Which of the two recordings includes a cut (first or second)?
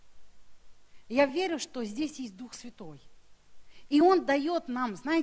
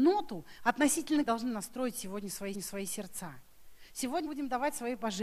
second